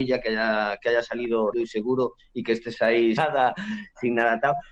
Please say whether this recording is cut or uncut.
cut